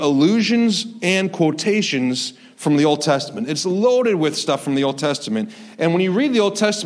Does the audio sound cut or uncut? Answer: uncut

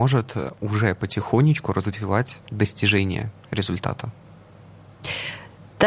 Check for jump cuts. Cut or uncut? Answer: cut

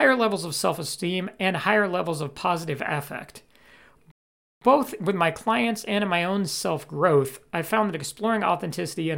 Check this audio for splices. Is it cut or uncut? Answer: uncut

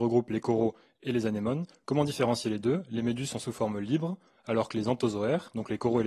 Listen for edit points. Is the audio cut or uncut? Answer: uncut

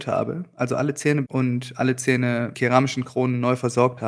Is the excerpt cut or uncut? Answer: cut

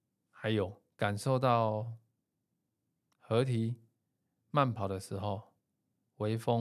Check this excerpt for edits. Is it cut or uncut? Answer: cut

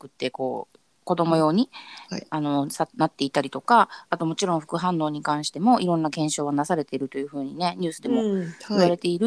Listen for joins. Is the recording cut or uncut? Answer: cut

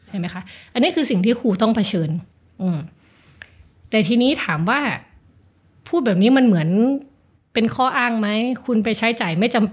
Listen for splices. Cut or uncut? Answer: uncut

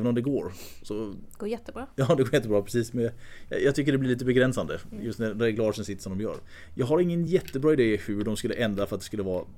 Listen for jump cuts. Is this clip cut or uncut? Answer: uncut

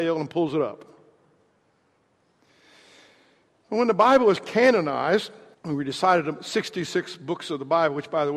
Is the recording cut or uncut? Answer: cut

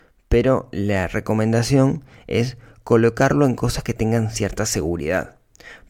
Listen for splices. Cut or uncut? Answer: uncut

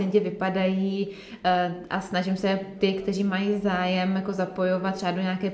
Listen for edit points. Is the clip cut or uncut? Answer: uncut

